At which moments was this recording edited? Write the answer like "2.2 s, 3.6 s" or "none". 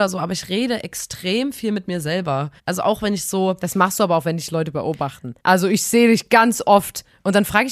2.6 s, 5.4 s